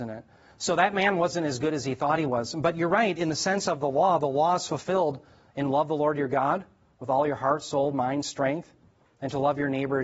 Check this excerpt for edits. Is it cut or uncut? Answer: uncut